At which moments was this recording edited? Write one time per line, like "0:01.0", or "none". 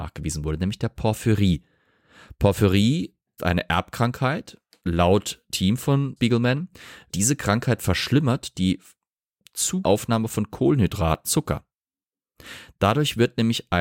0:03.4
0:04.8
0:05.5
0:06.2
0:07.1
0:08.5
0:09.8
0:11.2